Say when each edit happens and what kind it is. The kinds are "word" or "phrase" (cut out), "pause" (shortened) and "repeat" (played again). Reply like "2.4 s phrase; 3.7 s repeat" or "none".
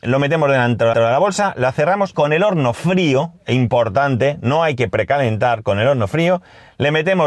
0.9 s repeat; 2.1 s word